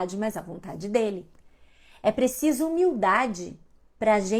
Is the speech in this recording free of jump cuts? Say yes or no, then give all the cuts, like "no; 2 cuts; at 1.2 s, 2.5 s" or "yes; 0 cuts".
yes; 0 cuts